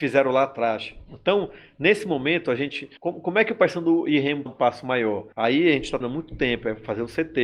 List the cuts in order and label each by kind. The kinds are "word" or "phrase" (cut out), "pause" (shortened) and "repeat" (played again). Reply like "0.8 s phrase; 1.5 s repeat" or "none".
3.0 s pause; 4.5 s phrase; 5.3 s pause; 6.0 s word